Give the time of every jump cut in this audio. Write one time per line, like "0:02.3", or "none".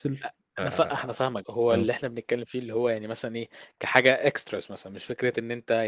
0:01.4